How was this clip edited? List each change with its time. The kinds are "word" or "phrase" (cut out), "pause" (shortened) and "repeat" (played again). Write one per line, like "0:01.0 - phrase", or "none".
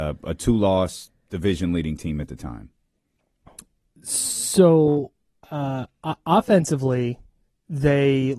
none